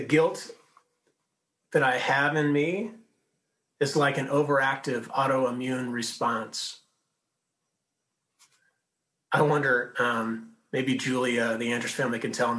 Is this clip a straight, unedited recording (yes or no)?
yes